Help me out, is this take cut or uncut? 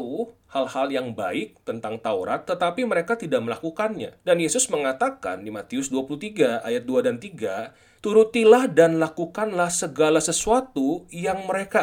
cut